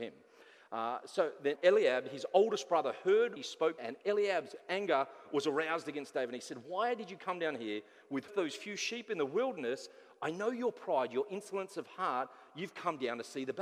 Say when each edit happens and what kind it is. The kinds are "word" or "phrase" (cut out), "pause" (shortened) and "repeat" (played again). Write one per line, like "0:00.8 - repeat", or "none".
0:01.6 - word
0:03.4 - word
0:03.8 - phrase
0:08.3 - phrase